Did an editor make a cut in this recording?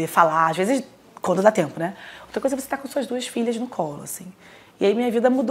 no; 0 cuts

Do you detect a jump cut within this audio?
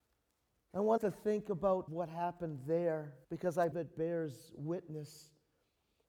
yes; 4 cuts; at 1.0 s, 1.9 s, 3.2 s, 3.7 s

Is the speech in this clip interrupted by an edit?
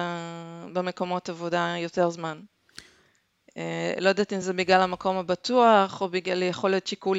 no; 0 cuts

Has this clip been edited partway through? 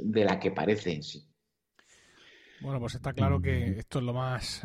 no; 0 cuts

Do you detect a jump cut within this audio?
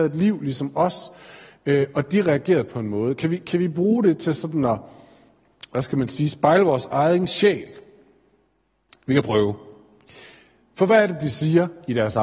no; 0 cuts

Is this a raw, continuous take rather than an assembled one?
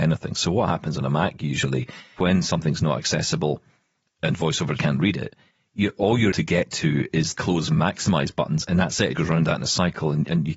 no; 6 cuts; at 2.2 s, 4.8 s, 6.3 s, 7.3 s, 7.7 s, 9.1 s

